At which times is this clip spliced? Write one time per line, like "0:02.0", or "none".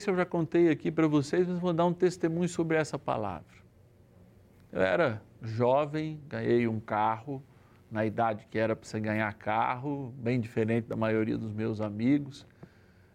none